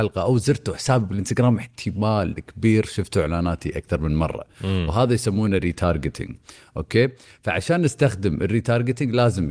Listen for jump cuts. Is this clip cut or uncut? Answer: uncut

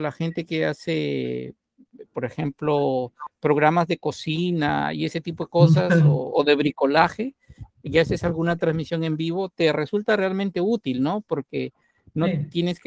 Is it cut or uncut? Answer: uncut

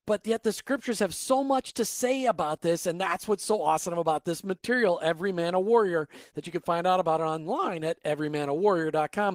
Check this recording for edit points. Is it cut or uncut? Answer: uncut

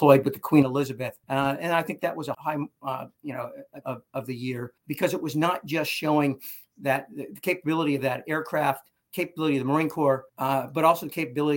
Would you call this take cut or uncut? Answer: cut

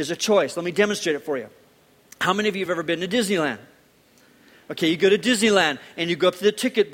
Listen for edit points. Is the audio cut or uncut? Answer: uncut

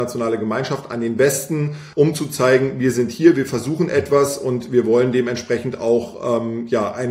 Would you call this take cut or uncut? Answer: uncut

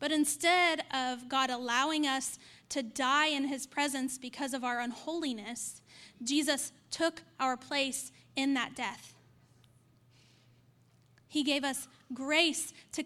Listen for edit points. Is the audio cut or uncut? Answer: uncut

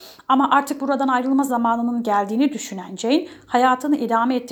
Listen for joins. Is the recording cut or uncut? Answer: uncut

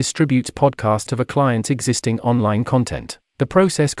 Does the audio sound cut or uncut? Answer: cut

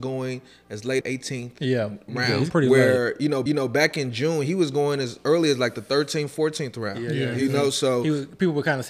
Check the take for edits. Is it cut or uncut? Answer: cut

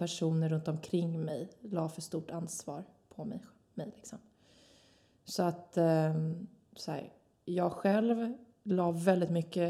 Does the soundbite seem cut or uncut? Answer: uncut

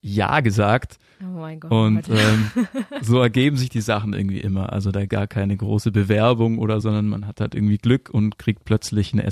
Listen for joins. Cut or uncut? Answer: cut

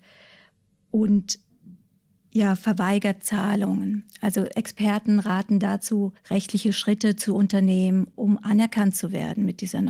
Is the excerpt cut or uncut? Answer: cut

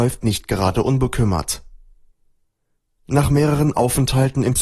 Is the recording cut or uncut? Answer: uncut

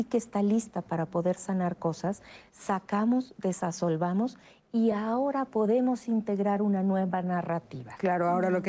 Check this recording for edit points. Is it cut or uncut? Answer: uncut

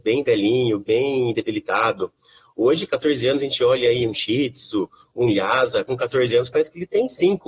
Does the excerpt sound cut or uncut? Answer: uncut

